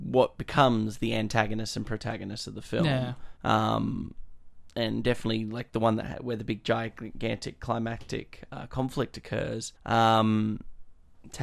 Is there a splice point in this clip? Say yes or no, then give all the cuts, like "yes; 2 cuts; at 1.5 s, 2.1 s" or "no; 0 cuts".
yes; 2 cuts; at 3.4 s, 9.8 s